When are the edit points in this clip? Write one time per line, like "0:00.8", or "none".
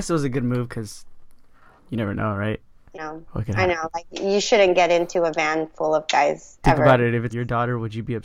0:02.9
0:07.3